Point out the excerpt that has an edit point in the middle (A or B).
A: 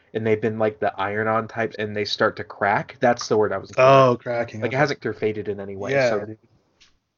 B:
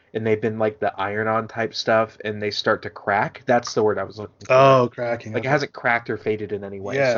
A